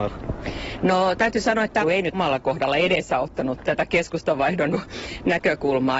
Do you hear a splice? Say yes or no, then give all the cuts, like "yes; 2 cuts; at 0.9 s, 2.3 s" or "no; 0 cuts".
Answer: yes; 4 cuts; at 1.8 s, 2.1 s, 3.6 s, 4.7 s